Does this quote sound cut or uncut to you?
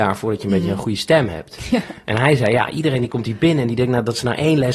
uncut